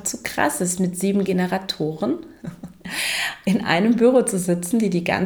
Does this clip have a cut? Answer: no; 0 cuts

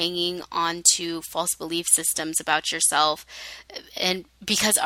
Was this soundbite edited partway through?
no; 0 cuts

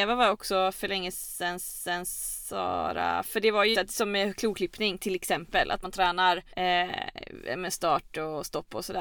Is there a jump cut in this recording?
yes; 4 cuts; at 1.6 s, 3.7 s, 5.8 s, 6.5 s

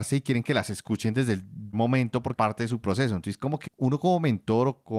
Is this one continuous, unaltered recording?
no; 3 cuts; at 1.7 s, 2.3 s, 3.7 s

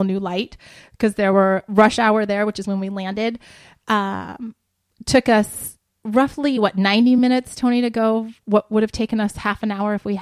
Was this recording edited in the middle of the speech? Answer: no; 0 cuts

